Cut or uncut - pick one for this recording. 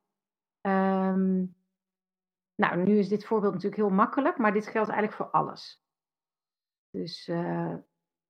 uncut